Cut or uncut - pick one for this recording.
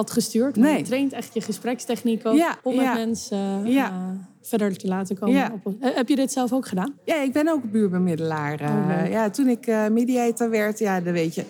cut